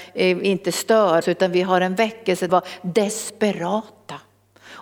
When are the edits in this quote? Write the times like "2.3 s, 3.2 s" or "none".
1.2 s, 2.5 s